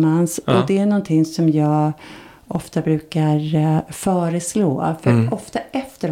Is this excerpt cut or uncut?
uncut